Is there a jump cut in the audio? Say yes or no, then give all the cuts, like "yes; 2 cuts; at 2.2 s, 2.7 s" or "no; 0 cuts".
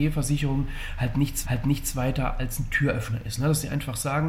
yes; 1 cut; at 1.4 s